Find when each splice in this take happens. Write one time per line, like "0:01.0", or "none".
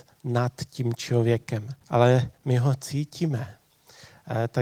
0:01.8